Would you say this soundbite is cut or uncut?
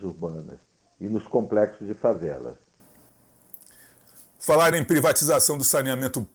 uncut